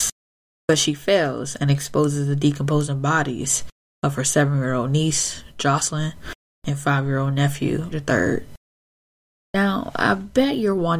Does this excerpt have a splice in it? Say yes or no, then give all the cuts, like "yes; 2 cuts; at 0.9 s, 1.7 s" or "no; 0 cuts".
yes; 1 cut; at 7.9 s